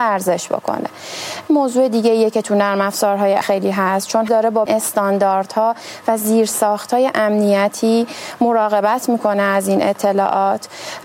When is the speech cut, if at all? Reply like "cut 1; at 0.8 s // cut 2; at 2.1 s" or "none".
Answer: cut 1; at 1.5 s // cut 2; at 3.4 s // cut 3; at 4.3 s // cut 4; at 4.7 s